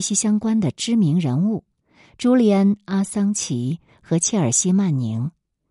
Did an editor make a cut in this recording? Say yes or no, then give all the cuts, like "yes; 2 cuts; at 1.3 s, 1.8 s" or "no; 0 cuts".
no; 0 cuts